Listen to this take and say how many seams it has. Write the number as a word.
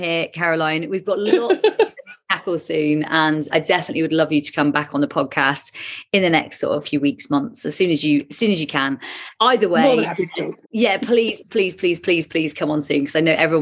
five